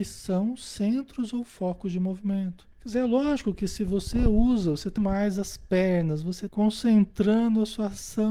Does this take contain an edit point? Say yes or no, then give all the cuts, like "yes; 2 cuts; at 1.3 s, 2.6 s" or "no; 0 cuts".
yes; 3 cuts; at 2.7 s, 5.0 s, 6.5 s